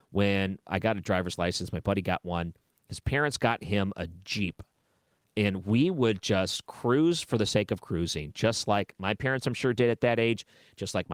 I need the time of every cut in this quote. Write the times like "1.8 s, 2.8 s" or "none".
none